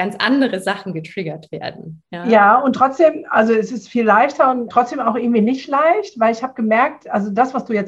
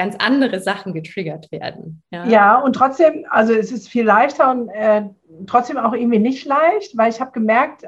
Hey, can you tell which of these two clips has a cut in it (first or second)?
first